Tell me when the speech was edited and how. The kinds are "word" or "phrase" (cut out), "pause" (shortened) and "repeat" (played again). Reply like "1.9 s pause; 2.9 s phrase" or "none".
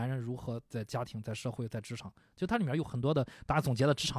none